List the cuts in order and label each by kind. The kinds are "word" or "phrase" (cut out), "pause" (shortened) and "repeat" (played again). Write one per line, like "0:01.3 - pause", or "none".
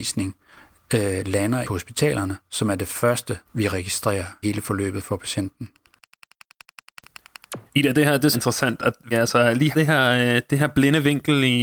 0:01.6 - word
0:03.4 - pause
0:04.4 - word
0:07.7 - pause
0:08.3 - phrase
0:09.1 - word
0:09.7 - word
0:10.6 - phrase